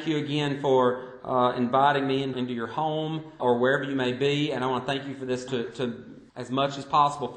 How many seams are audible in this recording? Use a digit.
4